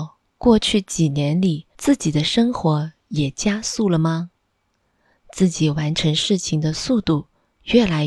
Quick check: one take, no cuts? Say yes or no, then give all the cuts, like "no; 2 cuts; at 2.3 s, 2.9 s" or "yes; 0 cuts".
yes; 0 cuts